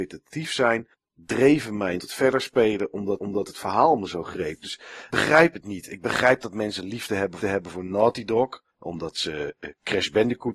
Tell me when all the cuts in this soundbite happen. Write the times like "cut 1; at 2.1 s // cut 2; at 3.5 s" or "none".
cut 1; at 0.9 s // cut 2; at 2.0 s // cut 3; at 3.2 s // cut 4; at 5.1 s // cut 5; at 7.4 s // cut 6; at 8.7 s